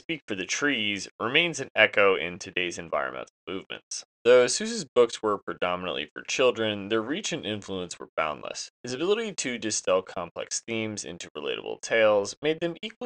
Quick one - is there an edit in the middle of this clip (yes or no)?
yes